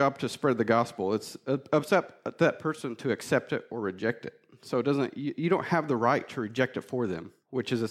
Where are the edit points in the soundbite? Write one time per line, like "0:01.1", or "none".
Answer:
none

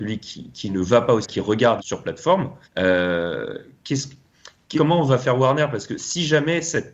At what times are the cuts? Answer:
0:01.2
0:01.8
0:02.6
0:04.8

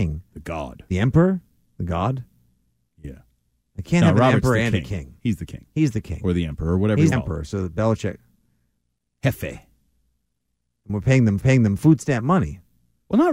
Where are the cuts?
0:03.8
0:07.1
0:11.4

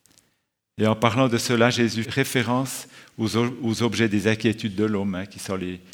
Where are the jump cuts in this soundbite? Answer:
0:02.0

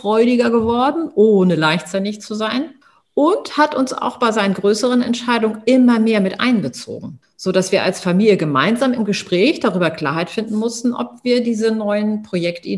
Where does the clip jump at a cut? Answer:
0:02.8
0:07.2

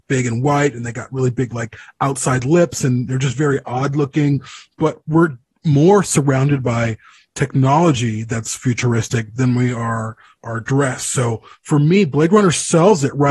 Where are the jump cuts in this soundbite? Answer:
none

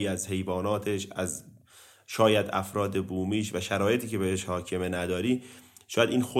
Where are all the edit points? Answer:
none

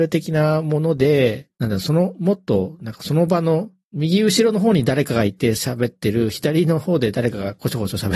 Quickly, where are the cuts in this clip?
0:01.5
0:03.8

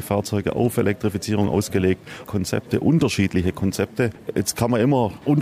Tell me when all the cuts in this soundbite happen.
0:02.2

